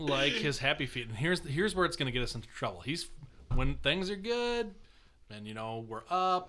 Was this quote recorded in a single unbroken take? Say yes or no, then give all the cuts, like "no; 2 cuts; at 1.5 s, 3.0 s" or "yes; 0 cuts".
yes; 0 cuts